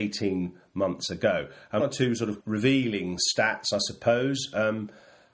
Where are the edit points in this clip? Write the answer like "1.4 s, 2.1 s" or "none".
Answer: 1.8 s, 2.4 s